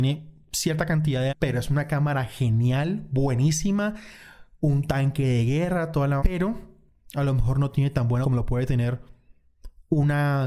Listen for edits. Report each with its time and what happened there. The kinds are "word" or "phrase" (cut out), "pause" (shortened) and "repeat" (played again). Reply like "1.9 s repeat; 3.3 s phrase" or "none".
1.3 s word; 6.2 s word; 8.2 s word